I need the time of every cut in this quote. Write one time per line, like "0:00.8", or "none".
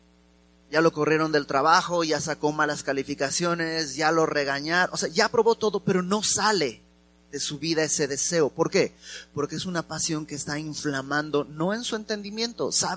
none